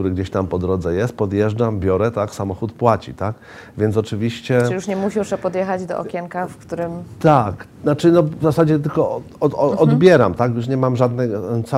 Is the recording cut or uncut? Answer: uncut